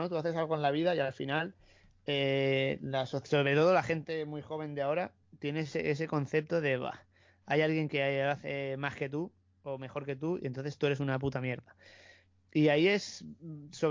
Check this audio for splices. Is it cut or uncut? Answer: uncut